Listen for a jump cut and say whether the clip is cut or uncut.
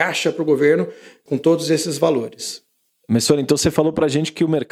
uncut